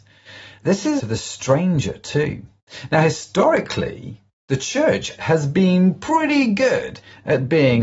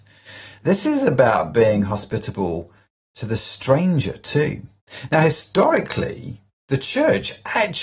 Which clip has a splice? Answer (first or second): first